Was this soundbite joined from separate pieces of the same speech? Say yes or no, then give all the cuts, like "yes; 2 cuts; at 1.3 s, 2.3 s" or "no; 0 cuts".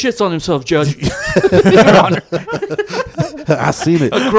no; 0 cuts